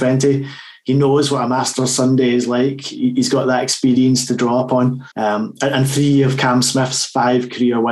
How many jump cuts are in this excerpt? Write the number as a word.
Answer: one